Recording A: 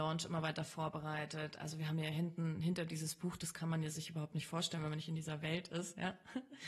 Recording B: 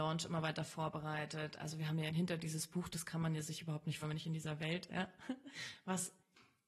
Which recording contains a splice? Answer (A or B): B